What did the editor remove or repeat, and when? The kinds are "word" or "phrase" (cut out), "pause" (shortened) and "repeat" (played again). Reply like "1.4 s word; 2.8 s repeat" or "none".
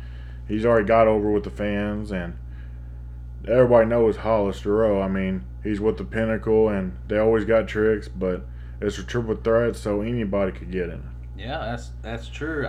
none